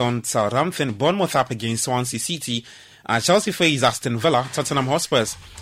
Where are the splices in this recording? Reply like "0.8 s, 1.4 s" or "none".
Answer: none